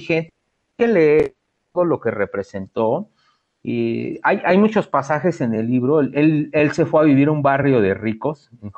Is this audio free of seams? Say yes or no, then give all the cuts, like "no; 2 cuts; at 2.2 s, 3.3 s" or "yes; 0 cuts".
yes; 0 cuts